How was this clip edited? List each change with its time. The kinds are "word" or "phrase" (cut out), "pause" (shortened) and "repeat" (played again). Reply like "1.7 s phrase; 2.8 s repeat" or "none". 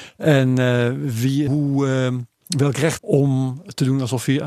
1.5 s word; 3.0 s phrase